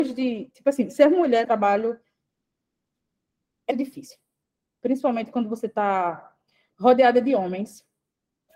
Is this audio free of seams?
no; 2 cuts; at 1.4 s, 3.7 s

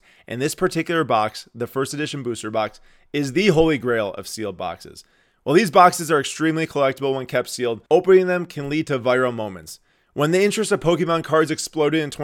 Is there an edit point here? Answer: yes; 1 cut; at 7.9 s

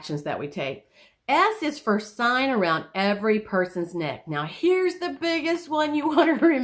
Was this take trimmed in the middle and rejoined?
no; 0 cuts

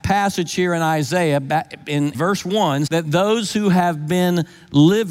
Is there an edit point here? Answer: yes; 2 cuts; at 2.1 s, 2.9 s

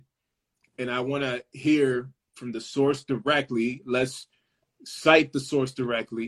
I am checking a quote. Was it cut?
no; 0 cuts

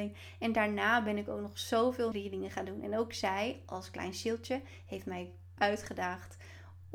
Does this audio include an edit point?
yes; 2 cuts; at 2.1 s, 5.6 s

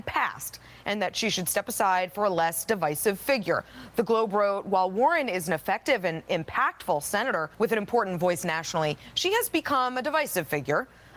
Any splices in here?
yes; 1 cut; at 7.5 s

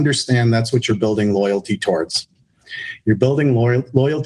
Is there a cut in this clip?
no; 0 cuts

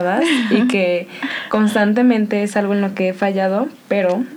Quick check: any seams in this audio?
no; 0 cuts

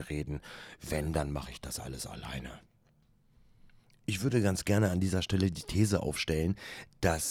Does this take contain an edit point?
no; 0 cuts

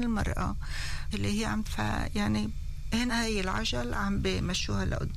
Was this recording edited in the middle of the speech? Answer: yes; 3 cuts; at 1.1 s, 1.6 s, 3.1 s

